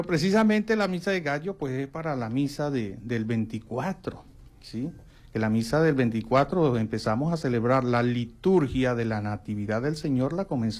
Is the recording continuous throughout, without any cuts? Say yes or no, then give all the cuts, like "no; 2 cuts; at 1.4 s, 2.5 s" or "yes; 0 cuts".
yes; 0 cuts